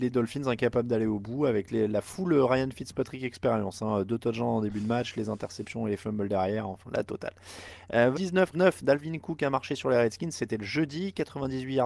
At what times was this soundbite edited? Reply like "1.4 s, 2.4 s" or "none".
6.9 s, 8.1 s, 8.5 s